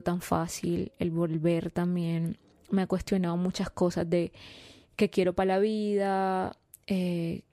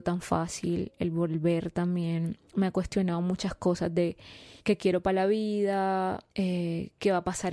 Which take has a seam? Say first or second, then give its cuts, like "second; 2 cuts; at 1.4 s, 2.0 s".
second; 3 cuts; at 2.5 s, 4.6 s, 6.3 s